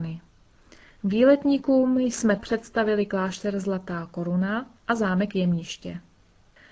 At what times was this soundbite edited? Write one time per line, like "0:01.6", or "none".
0:02.4
0:04.8